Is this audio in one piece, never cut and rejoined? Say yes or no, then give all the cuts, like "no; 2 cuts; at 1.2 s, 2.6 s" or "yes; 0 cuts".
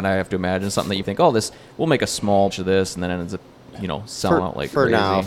no; 2 cuts; at 1.0 s, 2.5 s